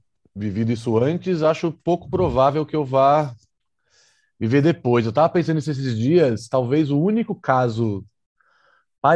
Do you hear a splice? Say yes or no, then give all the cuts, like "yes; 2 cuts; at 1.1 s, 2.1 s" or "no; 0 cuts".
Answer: no; 0 cuts